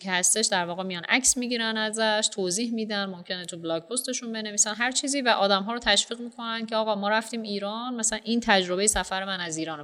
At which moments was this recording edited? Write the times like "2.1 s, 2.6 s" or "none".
none